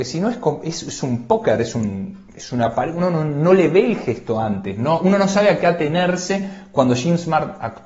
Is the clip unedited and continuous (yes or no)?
yes